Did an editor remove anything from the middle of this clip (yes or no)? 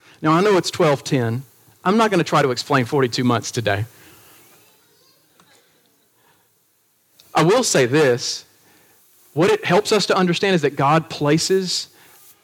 no